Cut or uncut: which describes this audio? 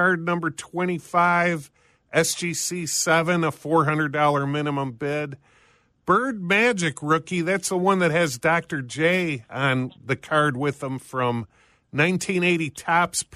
uncut